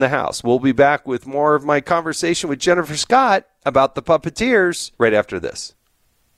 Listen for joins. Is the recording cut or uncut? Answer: cut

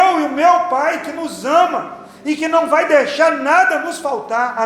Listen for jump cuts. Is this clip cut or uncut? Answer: uncut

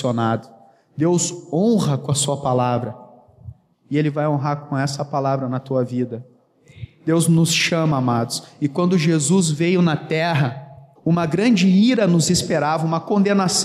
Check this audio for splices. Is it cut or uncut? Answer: cut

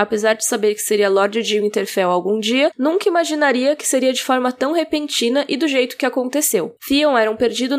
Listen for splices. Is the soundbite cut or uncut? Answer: uncut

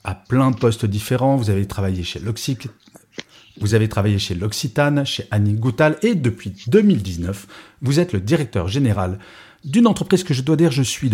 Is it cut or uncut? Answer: uncut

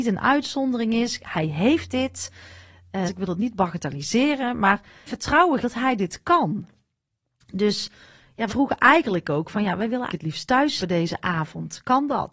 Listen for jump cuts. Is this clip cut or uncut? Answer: cut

